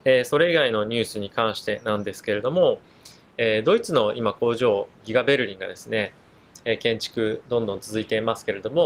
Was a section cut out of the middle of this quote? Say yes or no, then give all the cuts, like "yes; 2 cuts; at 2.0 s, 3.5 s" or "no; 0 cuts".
no; 0 cuts